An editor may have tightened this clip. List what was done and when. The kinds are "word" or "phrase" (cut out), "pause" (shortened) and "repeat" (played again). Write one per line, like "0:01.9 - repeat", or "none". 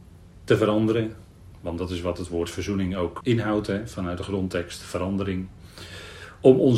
0:03.2 - word